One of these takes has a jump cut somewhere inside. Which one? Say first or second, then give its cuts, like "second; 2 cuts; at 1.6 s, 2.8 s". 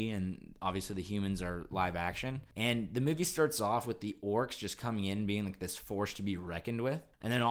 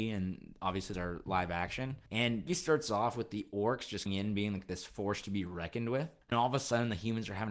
second; 4 cuts; at 0.9 s, 2.5 s, 4.1 s, 6.3 s